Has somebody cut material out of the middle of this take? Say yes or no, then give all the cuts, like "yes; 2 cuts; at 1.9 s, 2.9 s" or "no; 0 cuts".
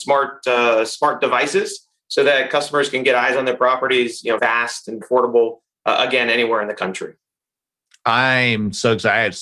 yes; 2 cuts; at 4.4 s, 5.0 s